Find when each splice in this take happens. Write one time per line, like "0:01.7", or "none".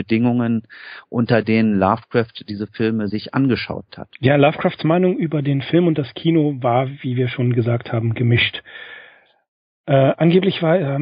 0:04.1